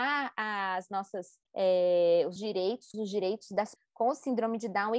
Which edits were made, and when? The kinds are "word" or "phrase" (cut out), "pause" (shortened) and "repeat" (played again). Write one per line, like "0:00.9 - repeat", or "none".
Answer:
0:01.5 - pause
0:02.4 - word
0:02.9 - word
0:03.8 - word